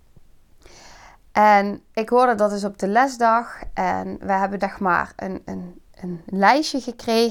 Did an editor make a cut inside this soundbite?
yes; 2 cuts; at 1.9 s, 4.6 s

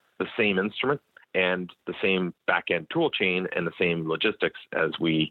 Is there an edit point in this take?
no; 0 cuts

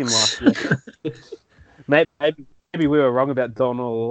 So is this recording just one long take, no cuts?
no; 1 cut; at 2.0 s

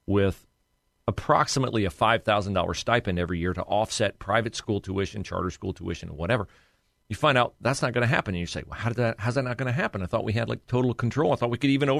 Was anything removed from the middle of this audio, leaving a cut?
no; 0 cuts

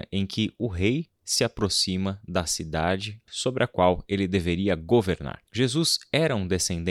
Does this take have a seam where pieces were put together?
yes; 1 cut; at 5.5 s

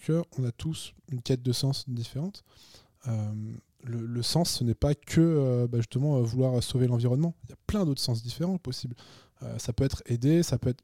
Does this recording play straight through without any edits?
yes; 0 cuts

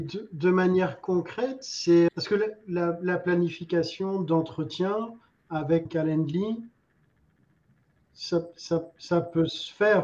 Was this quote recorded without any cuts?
no; 2 cuts; at 2.1 s, 5.9 s

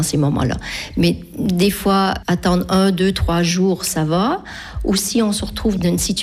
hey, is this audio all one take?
yes; 0 cuts

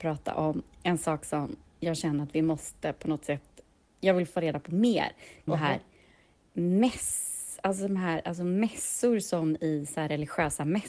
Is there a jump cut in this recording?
yes; 1 cut; at 5.5 s

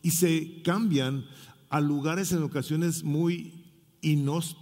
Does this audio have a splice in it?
no; 0 cuts

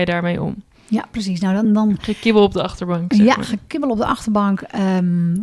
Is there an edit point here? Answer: no; 0 cuts

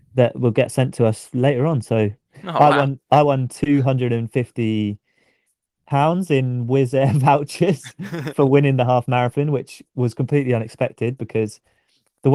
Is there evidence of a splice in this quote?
no; 0 cuts

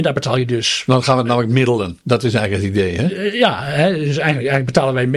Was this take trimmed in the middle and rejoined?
no; 0 cuts

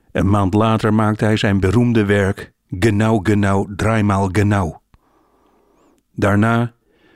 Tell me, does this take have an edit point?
no; 0 cuts

